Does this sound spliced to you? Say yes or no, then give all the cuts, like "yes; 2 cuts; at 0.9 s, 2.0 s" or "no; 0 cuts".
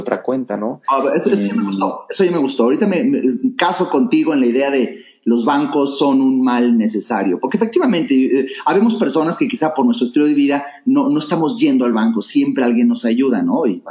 no; 0 cuts